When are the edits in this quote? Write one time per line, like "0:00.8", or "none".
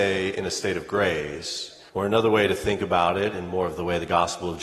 0:01.9